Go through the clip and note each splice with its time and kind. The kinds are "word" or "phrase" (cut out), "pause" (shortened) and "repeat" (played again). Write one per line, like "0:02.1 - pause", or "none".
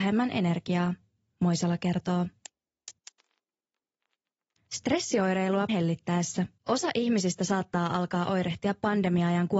0:05.7 - word
0:06.6 - pause